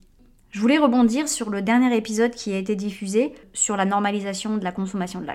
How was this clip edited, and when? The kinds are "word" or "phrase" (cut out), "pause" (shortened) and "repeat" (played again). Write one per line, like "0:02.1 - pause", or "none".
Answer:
none